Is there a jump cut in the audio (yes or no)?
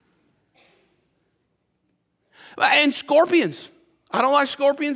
no